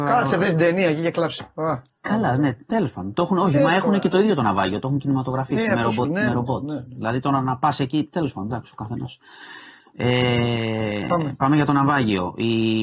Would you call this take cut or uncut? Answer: uncut